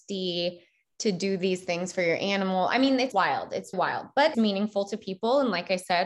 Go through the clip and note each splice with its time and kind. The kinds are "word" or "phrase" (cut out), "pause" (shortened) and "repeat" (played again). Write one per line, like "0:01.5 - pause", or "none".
0:03.1 - word
0:03.7 - word
0:04.3 - word

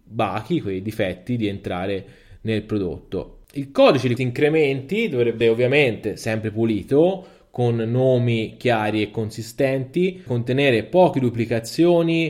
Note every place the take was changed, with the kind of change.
0:04.2 - word
0:05.4 - word
0:10.3 - word

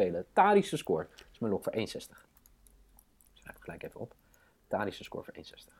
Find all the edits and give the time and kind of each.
none

